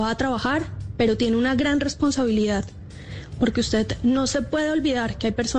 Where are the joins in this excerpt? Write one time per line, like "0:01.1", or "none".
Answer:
none